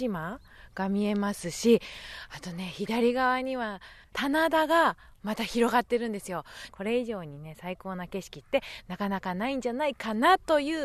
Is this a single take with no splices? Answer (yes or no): no